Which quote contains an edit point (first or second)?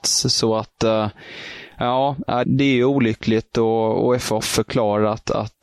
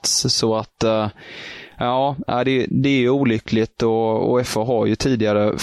first